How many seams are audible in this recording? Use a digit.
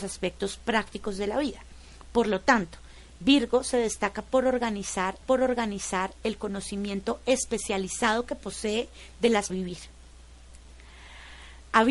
2